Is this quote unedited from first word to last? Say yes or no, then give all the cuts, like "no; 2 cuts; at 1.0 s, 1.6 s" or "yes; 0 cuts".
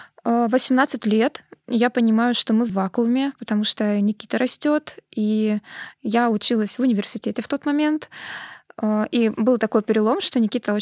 no; 1 cut; at 2.7 s